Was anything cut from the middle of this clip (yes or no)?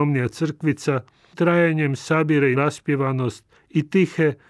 yes